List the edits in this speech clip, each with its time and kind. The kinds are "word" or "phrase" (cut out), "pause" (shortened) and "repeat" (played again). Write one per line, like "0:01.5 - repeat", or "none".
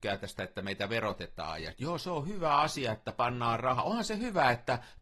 0:01.7 - word